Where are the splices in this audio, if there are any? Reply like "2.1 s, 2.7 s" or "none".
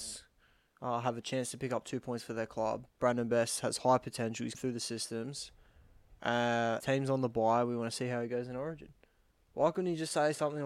2.9 s, 4.5 s, 6.8 s